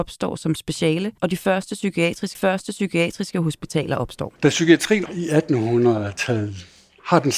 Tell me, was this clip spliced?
yes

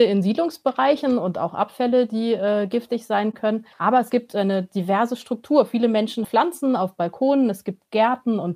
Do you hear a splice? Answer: yes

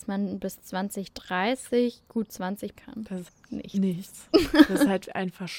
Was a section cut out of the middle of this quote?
yes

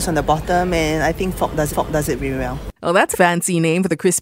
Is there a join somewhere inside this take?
yes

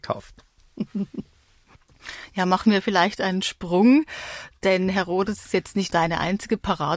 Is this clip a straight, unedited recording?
yes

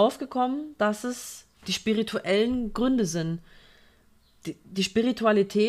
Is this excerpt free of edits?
no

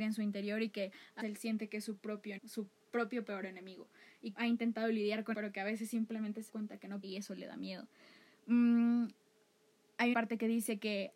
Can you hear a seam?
yes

